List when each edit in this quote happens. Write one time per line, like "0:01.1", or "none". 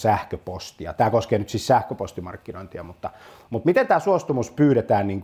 none